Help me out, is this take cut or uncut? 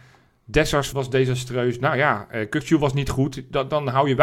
cut